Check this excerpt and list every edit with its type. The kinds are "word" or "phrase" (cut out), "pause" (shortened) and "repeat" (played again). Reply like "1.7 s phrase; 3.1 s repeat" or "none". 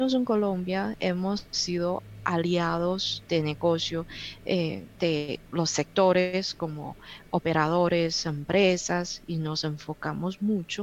5.5 s pause